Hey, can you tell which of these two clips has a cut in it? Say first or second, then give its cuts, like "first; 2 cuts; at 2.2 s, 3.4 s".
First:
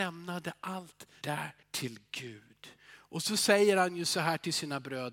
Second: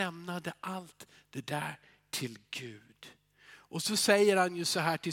first; 3 cuts; at 1.2 s, 1.6 s, 2.8 s